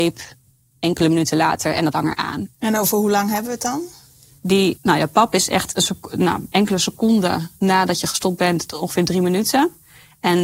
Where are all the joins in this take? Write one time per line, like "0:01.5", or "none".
0:01.9
0:02.5
0:04.8